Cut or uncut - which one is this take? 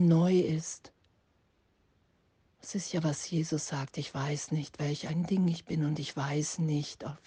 uncut